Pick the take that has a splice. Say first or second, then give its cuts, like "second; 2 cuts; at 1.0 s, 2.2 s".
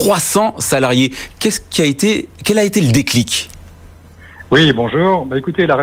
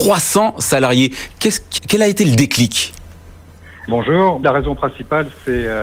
second; 3 cuts; at 1.8 s, 3.9 s, 4.4 s